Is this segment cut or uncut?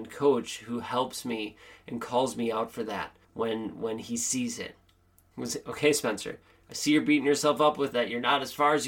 cut